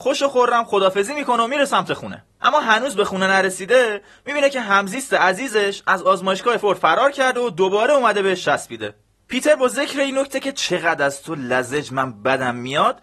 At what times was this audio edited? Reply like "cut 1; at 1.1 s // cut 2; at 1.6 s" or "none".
cut 1; at 6.6 s